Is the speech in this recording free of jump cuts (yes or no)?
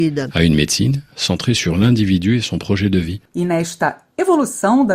yes